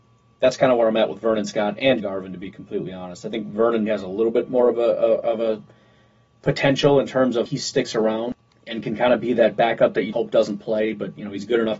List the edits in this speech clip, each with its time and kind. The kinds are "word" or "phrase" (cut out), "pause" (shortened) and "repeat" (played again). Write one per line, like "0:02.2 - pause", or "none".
0:02.0 - word
0:03.9 - word
0:07.5 - word
0:10.1 - word